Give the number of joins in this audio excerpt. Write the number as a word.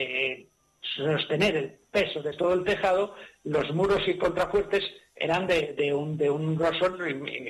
zero